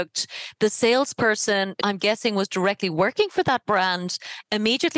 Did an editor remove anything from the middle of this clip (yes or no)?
yes